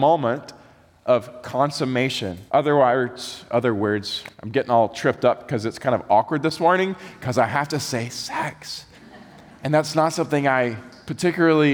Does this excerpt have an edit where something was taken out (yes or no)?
yes